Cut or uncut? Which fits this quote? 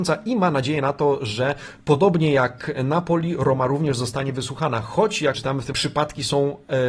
cut